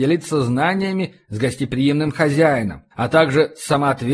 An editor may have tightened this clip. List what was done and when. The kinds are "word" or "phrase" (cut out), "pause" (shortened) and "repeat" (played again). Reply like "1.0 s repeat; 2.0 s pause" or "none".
2.9 s pause